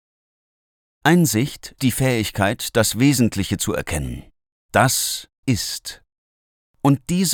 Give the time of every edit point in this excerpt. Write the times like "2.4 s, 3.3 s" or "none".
1.8 s, 5.4 s

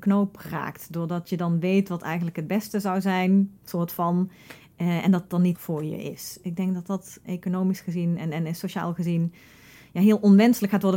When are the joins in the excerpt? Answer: 3.6 s, 5.5 s, 7.3 s

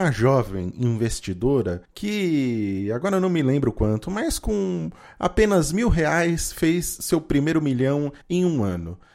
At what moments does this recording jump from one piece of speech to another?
1.8 s, 8.2 s

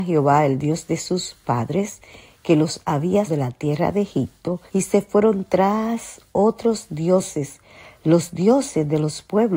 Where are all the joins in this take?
3.3 s, 4.7 s

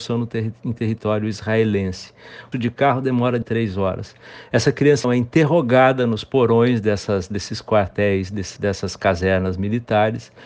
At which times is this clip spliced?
2.5 s, 3.4 s, 5.0 s, 8.6 s

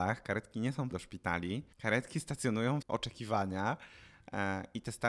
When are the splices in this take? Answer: 0.9 s, 1.7 s, 2.8 s

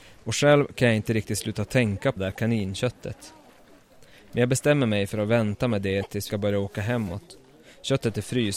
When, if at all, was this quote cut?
2.2 s, 6.3 s

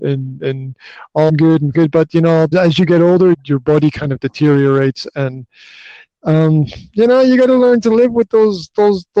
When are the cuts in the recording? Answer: 1.3 s, 1.7 s, 2.5 s, 3.3 s

